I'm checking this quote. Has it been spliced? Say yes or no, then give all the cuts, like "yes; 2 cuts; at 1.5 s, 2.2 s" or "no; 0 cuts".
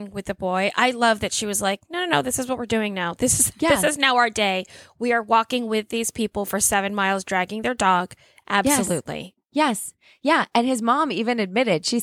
no; 0 cuts